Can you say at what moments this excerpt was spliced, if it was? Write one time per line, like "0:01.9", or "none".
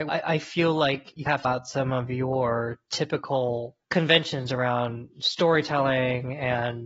0:01.4